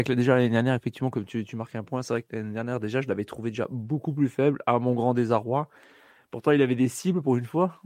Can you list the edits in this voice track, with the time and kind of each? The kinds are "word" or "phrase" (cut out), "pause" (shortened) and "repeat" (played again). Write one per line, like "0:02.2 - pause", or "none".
none